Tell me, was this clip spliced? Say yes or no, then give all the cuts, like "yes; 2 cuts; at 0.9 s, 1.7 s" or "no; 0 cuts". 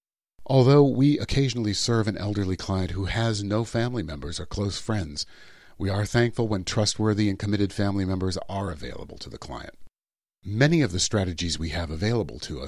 no; 0 cuts